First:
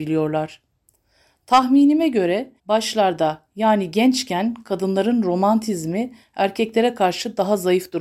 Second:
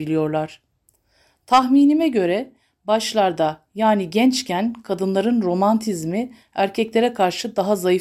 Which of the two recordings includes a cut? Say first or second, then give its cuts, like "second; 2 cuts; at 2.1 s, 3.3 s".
first; 1 cut; at 2.6 s